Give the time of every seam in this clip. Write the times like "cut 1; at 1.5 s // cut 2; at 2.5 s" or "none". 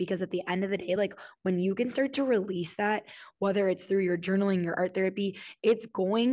none